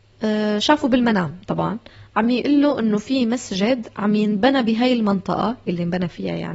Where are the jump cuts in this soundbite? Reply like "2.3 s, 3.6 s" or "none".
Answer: 1.4 s